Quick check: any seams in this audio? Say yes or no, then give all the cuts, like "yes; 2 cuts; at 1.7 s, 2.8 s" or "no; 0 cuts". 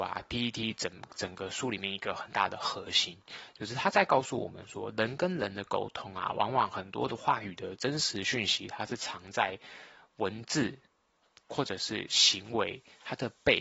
no; 0 cuts